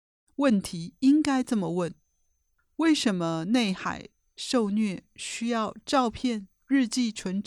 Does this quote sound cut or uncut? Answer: uncut